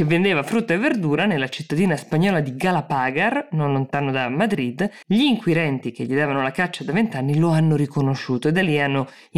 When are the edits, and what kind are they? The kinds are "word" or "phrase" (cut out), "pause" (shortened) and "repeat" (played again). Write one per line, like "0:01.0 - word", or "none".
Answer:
0:05.0 - pause